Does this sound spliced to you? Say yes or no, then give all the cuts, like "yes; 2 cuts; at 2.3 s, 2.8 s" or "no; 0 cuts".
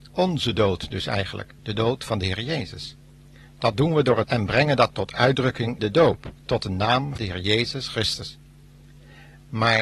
yes; 5 cuts; at 1.6 s, 4.2 s, 5.8 s, 6.4 s, 7.2 s